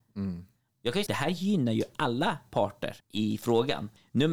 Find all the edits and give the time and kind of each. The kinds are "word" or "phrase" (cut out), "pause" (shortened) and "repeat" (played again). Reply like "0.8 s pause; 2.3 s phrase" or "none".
1.1 s phrase; 3.0 s pause